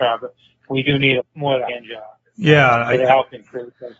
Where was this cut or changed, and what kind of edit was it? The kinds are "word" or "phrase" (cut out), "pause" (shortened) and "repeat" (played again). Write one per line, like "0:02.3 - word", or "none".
0:01.2 - phrase
0:01.7 - word